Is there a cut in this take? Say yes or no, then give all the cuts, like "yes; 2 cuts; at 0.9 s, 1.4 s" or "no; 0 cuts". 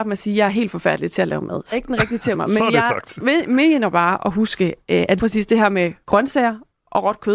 yes; 4 cuts; at 1.7 s, 2.3 s, 5.2 s, 6.0 s